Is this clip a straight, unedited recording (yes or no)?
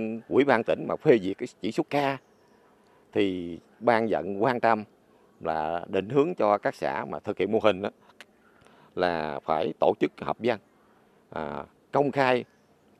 yes